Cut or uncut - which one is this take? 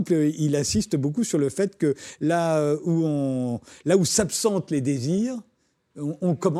uncut